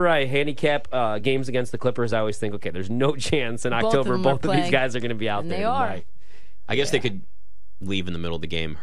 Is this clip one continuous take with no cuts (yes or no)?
yes